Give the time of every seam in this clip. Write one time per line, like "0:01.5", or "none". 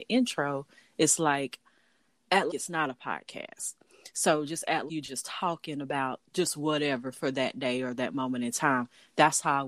0:02.5
0:04.9
0:06.3